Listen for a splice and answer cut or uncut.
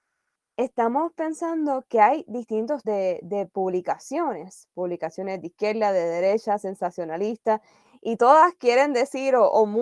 cut